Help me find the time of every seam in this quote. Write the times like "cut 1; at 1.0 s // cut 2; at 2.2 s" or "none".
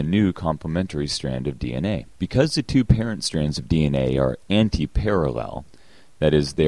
cut 1; at 2.1 s // cut 2; at 5.7 s